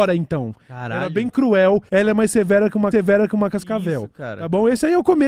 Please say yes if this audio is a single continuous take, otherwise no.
no